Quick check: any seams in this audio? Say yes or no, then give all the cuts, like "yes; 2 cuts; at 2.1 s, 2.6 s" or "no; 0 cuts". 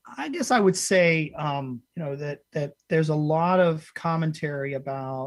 yes; 1 cut; at 1.9 s